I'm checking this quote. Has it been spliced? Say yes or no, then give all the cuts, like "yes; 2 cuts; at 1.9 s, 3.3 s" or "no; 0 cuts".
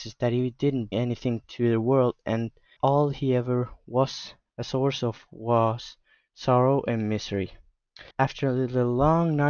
yes; 3 cuts; at 0.9 s, 2.8 s, 8.1 s